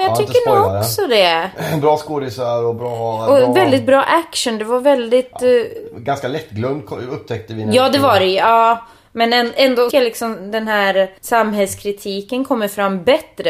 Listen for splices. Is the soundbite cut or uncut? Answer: cut